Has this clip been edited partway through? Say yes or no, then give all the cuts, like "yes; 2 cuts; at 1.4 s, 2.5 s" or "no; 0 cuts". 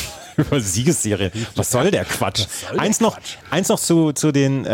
no; 0 cuts